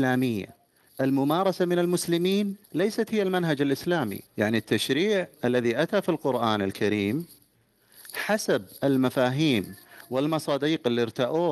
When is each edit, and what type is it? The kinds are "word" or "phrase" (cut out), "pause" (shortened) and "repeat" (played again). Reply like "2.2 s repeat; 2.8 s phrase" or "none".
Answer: 2.6 s pause; 4.3 s pause; 5.3 s pause